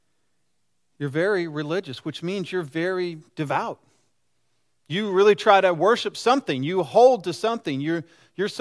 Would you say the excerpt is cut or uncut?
uncut